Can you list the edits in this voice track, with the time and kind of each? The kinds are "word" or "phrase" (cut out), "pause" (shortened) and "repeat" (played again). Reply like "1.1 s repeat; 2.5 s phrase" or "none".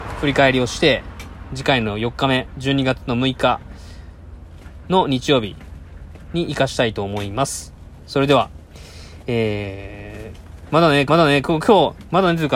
11.1 s repeat